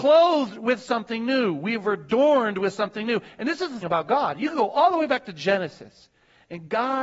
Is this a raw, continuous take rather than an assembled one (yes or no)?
no